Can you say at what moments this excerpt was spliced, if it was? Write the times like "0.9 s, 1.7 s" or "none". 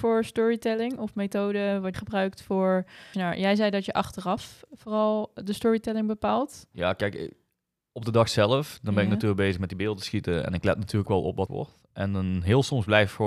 1.9 s, 3.1 s, 11.1 s, 11.5 s